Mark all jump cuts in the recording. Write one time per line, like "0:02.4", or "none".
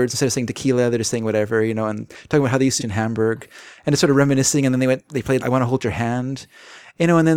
0:02.8
0:05.4